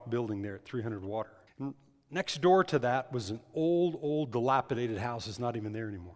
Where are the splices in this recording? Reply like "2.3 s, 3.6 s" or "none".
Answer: 1.5 s